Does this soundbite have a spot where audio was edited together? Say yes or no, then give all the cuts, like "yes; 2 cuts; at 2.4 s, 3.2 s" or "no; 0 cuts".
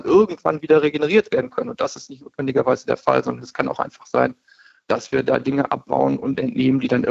no; 0 cuts